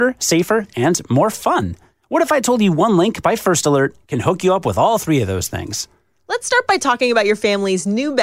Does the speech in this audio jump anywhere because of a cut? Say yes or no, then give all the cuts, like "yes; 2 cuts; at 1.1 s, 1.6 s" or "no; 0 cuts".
no; 0 cuts